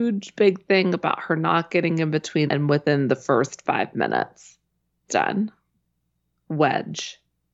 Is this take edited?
yes; 2 cuts; at 2.5 s, 5.1 s

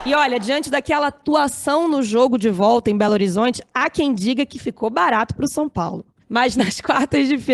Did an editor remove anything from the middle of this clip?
no; 0 cuts

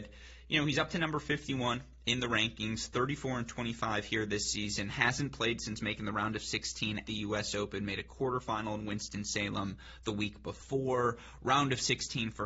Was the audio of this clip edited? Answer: yes; 1 cut; at 7.0 s

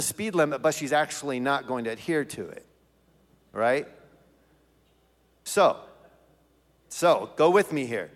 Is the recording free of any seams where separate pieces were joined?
yes; 0 cuts

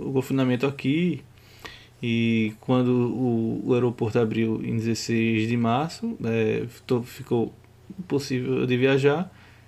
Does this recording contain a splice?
no; 0 cuts

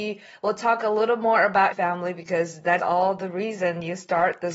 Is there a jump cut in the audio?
yes; 2 cuts; at 1.7 s, 2.8 s

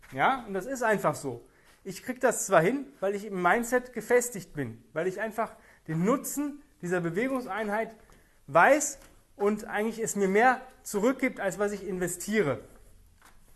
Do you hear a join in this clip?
no; 0 cuts

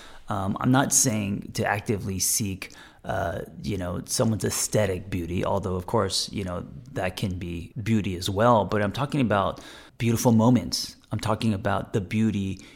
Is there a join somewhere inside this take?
yes; 2 cuts; at 7.7 s, 9.9 s

